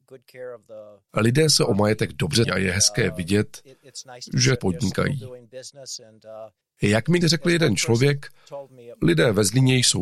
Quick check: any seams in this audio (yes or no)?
yes